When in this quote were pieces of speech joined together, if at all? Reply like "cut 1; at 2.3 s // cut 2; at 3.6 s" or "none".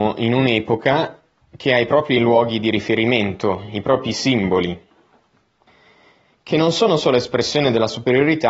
none